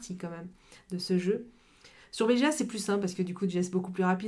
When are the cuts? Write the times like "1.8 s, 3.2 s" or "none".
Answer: none